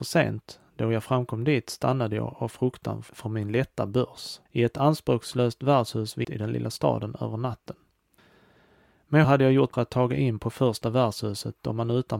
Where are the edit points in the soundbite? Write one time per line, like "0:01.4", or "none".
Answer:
0:04.5
0:06.2
0:09.2
0:09.7